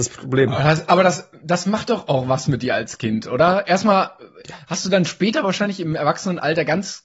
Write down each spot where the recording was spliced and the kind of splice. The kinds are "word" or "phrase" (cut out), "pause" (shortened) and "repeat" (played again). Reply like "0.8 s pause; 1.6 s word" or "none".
none